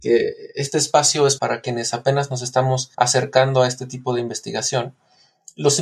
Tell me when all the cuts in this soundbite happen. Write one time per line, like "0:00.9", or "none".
0:01.4
0:02.9